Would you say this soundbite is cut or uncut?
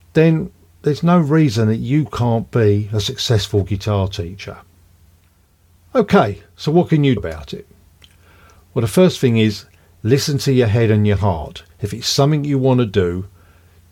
cut